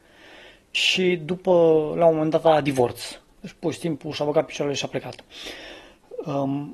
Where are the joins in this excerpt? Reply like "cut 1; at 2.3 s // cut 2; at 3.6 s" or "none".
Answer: none

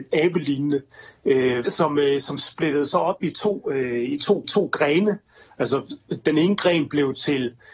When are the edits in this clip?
cut 1; at 1.6 s // cut 2; at 4.4 s

